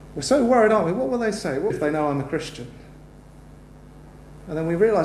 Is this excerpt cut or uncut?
cut